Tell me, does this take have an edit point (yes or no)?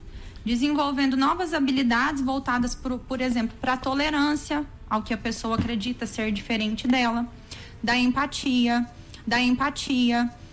yes